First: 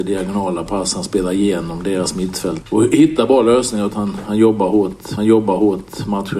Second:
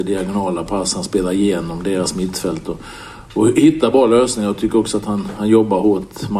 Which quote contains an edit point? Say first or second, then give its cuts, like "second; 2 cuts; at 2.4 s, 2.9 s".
first; 3 cuts; at 2.6 s, 3.9 s, 5.2 s